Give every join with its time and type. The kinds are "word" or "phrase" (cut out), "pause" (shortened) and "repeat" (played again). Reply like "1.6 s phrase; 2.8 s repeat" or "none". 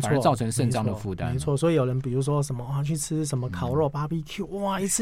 none

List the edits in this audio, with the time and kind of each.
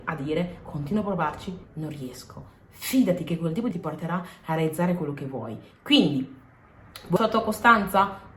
1.6 s phrase; 3.7 s word; 7.2 s word

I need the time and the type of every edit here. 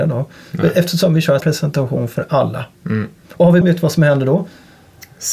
1.4 s word; 3.6 s word

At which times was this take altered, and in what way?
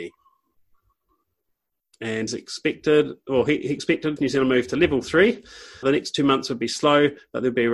2.3 s word; 4.2 s word; 5.8 s word

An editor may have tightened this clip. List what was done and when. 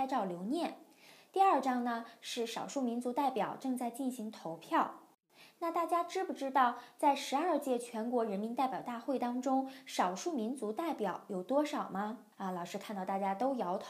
12.3 s pause

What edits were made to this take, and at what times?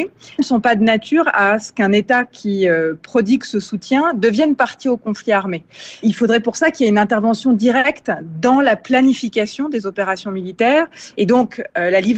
none

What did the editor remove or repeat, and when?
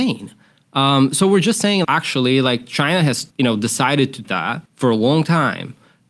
1.8 s word; 3.3 s pause; 4.2 s phrase; 4.7 s pause

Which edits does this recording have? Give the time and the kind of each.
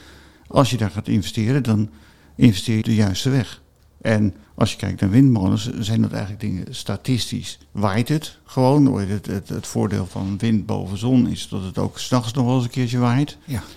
2.8 s word; 4.4 s pause; 10.1 s word

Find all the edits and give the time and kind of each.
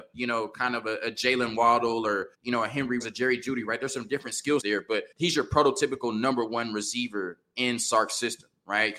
2.3 s pause; 3.0 s word; 4.6 s word; 5.1 s pause

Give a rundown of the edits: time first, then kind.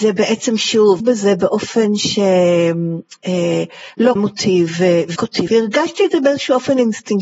1.0 s word; 4.2 s word; 5.2 s word; 5.5 s word

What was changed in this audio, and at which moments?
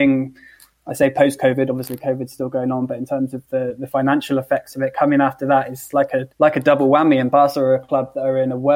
6.3 s pause

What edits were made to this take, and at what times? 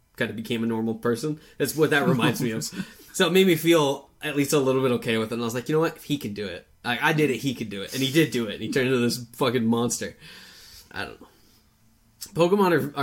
3.1 s pause; 10.9 s pause

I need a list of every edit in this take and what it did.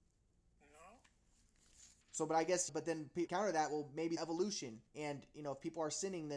2.0 s pause; 2.7 s phrase; 3.3 s phrase; 4.2 s phrase; 4.9 s pause

